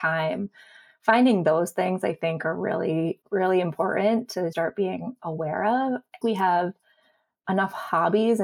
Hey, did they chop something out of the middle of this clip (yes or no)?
yes